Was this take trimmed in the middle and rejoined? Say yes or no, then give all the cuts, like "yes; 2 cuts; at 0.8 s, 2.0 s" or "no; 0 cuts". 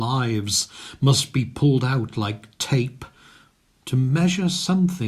no; 0 cuts